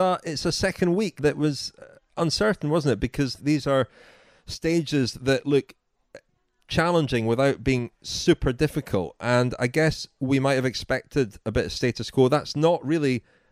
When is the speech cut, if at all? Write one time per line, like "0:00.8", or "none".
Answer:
0:01.2
0:02.2
0:03.4